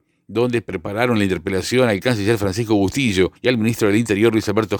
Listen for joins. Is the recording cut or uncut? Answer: cut